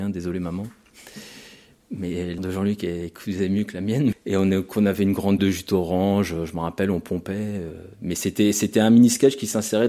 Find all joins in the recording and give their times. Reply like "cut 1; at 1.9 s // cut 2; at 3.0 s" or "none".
cut 1; at 2.4 s // cut 2; at 4.1 s // cut 3; at 5.4 s